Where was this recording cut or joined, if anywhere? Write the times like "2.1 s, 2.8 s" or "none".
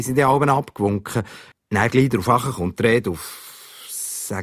1.5 s